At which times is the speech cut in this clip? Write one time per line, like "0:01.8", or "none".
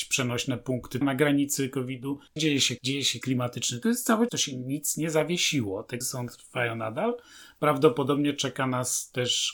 0:01.0
0:02.4
0:02.8
0:03.2
0:03.8
0:04.3
0:06.0